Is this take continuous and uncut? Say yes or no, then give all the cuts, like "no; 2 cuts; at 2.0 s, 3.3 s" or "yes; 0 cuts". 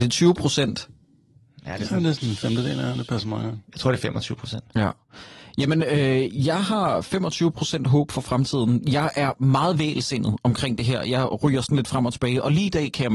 yes; 0 cuts